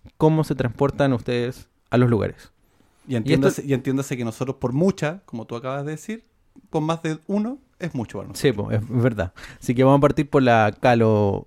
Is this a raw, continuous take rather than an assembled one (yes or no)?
yes